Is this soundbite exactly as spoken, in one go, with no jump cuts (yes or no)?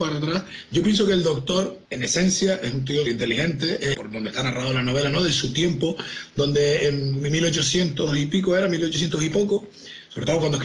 no